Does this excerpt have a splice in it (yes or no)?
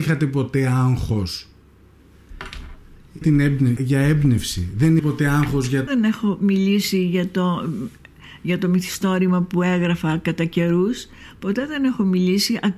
yes